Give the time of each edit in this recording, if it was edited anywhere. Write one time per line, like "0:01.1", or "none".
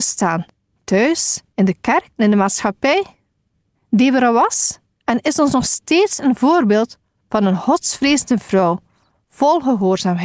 none